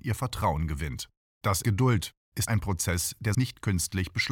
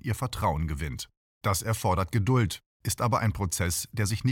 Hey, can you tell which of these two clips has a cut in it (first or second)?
first